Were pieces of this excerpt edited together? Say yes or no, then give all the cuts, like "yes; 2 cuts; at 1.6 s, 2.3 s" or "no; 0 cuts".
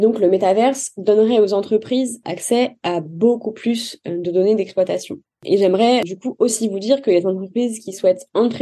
no; 0 cuts